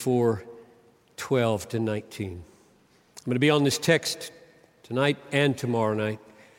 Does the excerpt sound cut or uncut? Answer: uncut